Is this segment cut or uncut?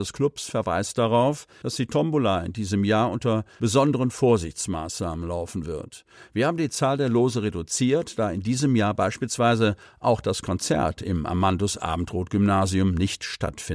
uncut